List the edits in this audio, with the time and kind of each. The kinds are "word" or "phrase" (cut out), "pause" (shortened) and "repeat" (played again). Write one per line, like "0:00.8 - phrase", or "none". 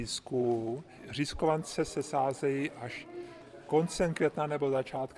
none